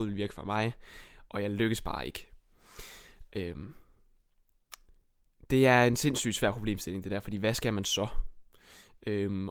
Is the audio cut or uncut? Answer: uncut